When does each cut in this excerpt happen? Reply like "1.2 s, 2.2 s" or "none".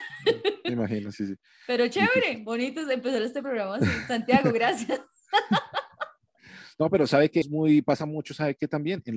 1.1 s, 7.4 s